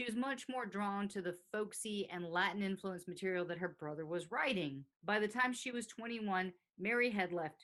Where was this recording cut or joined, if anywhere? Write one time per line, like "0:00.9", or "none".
0:04.9